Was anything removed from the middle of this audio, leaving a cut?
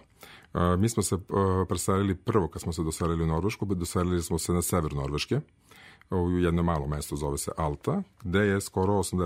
no; 0 cuts

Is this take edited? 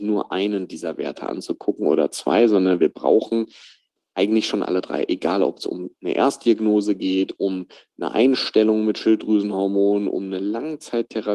no; 0 cuts

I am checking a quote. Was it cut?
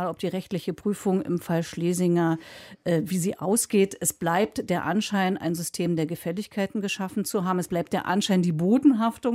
no; 0 cuts

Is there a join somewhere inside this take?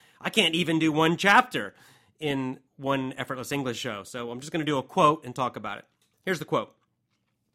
yes; 1 cut; at 2.7 s

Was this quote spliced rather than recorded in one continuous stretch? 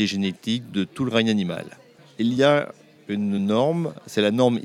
no; 0 cuts

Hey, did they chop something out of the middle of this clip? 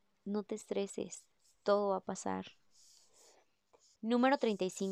no; 0 cuts

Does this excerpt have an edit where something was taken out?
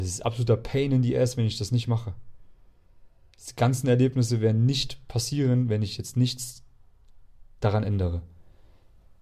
no; 0 cuts

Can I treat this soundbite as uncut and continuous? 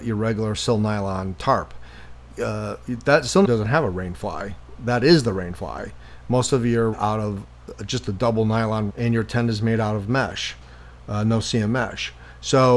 no; 3 cuts; at 3.4 s, 6.9 s, 8.9 s

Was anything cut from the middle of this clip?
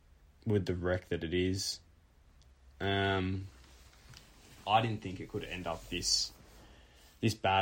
no; 0 cuts

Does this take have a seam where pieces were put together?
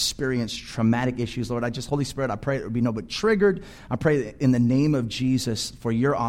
no; 0 cuts

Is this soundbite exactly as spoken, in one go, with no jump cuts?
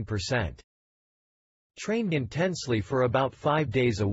no; 1 cut; at 2.1 s

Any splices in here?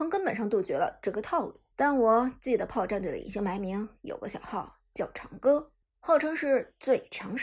yes; 2 cuts; at 1.7 s, 5.9 s

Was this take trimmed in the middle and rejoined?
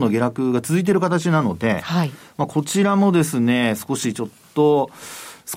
no; 0 cuts

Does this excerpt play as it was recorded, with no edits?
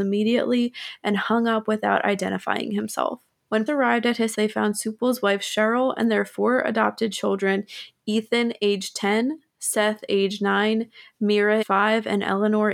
no; 3 cuts; at 3.7 s, 4.3 s, 11.6 s

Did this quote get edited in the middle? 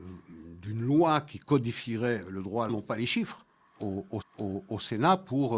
yes; 2 cuts; at 2.7 s, 4.2 s

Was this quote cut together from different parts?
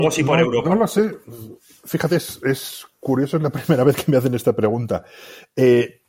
no; 0 cuts

